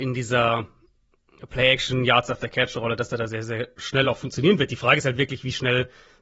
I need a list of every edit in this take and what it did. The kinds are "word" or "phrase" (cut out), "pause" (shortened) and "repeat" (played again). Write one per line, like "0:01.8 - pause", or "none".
none